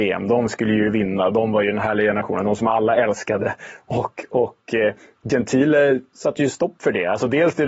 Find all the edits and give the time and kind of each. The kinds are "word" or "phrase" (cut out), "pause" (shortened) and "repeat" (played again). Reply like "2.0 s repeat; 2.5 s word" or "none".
none